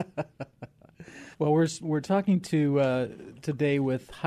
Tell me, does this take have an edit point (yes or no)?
yes